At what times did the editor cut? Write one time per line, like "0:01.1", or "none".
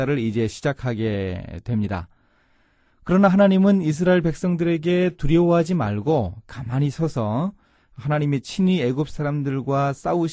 none